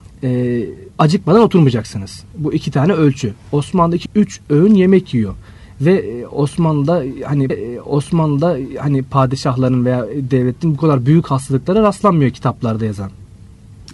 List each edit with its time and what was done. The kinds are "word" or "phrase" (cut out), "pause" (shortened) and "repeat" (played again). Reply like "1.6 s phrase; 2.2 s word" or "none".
0.9 s pause; 4.1 s word; 7.5 s repeat

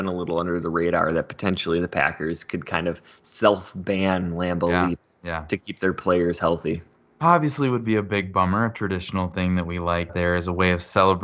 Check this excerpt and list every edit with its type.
10.1 s word

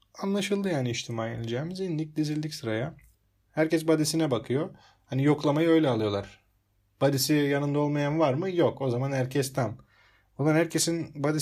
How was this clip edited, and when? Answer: none

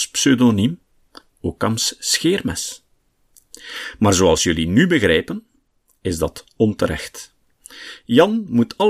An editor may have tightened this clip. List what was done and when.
none

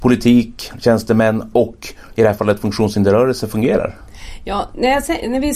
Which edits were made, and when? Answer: none

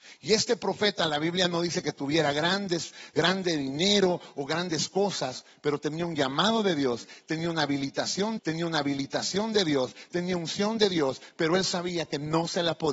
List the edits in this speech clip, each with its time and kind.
8.4 s repeat

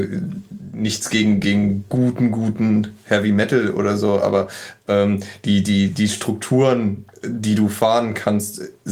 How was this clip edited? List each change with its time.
none

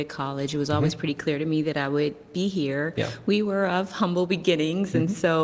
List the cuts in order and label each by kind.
none

